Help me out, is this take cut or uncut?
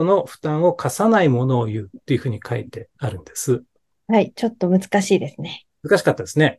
uncut